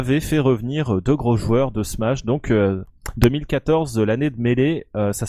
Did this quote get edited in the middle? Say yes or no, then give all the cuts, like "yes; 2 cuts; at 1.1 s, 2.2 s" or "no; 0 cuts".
no; 0 cuts